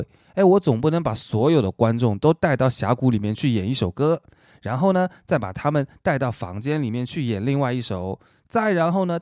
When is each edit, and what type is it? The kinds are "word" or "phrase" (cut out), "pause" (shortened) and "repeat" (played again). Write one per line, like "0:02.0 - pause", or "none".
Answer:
none

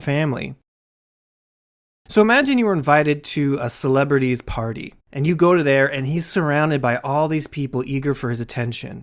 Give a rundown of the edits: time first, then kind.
0:05.0 - pause

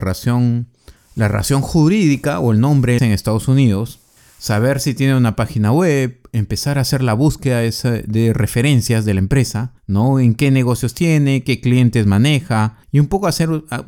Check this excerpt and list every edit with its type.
0:01.0 - pause
0:03.0 - phrase
0:04.2 - pause
0:09.8 - pause
0:12.8 - pause

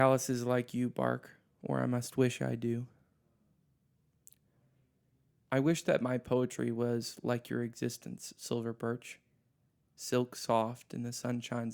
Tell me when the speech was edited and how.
none

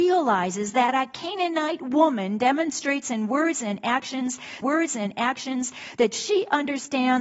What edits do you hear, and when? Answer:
0:04.6 - repeat

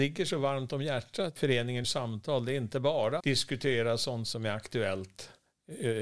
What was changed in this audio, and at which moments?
0:01.4 - word
0:01.8 - word
0:03.2 - word

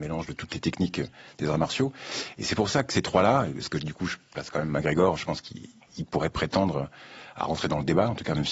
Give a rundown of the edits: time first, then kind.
none

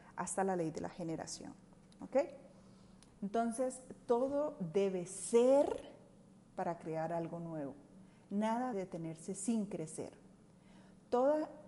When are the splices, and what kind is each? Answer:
0:08.7 - word

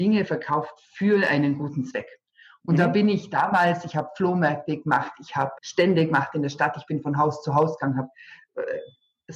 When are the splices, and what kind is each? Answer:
0:05.6 - word

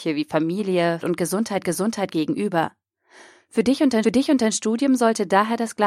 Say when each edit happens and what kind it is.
0:01.0 - phrase
0:01.6 - repeat
0:04.0 - repeat

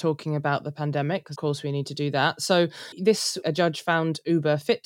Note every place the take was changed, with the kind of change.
0:01.4 - word
0:02.9 - word
0:03.4 - word

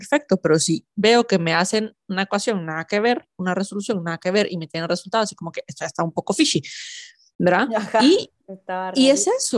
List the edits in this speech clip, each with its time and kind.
none

